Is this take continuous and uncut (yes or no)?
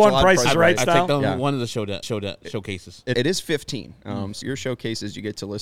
no